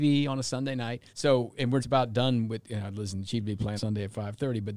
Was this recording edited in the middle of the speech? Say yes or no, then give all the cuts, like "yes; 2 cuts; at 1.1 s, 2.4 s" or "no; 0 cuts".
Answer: yes; 3 cuts; at 1.1 s, 1.8 s, 3.8 s